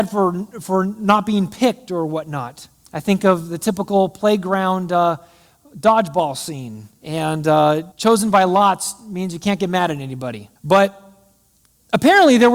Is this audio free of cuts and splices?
no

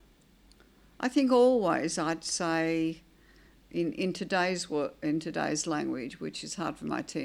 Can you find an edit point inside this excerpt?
no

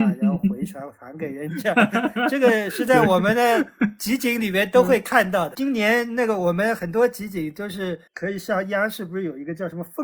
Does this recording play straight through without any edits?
no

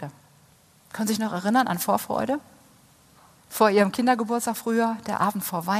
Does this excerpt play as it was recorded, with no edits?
yes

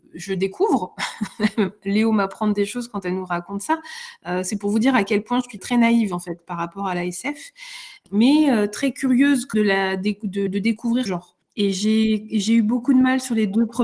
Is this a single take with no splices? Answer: no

